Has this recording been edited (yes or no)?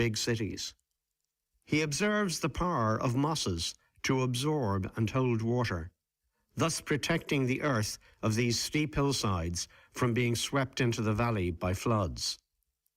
no